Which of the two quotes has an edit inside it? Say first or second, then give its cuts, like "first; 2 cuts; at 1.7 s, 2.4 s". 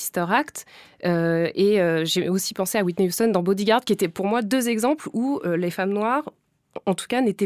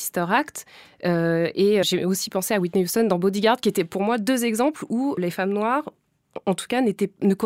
second; 2 cuts; at 1.8 s, 5.2 s